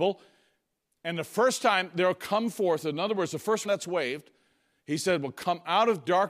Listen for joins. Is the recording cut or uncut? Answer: cut